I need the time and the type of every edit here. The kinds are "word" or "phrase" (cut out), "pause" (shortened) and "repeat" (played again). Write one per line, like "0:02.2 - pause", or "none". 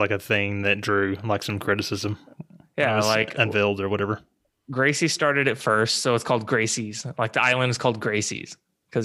none